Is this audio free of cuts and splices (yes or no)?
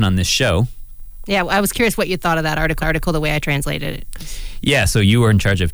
no